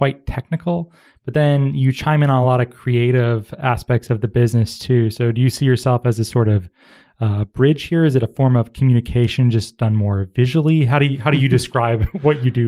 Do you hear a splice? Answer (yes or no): no